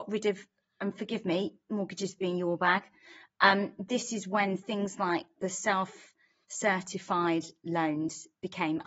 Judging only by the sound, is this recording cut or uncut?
uncut